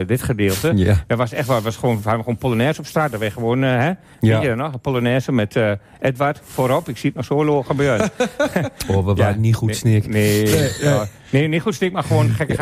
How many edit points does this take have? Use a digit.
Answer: 0